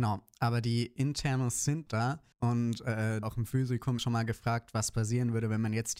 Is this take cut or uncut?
cut